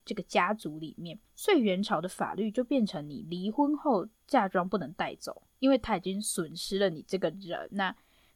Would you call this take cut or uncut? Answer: cut